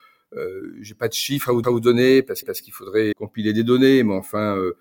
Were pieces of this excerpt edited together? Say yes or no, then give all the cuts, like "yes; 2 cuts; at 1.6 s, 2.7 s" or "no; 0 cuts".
yes; 3 cuts; at 1.6 s, 2.4 s, 3.1 s